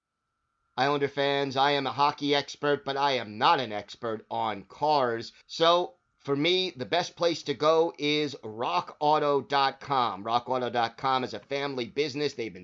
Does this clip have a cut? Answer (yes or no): yes